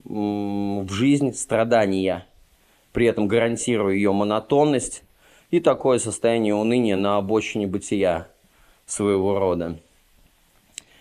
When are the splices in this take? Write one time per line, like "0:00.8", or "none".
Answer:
none